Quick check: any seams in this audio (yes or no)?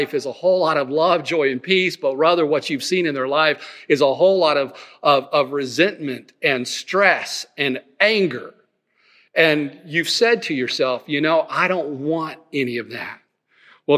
no